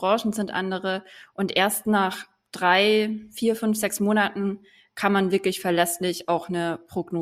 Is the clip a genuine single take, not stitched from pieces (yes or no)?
yes